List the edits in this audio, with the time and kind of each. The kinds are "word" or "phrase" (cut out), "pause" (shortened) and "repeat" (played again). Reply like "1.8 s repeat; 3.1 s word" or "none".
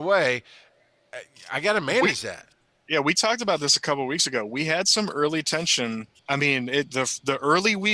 6.2 s pause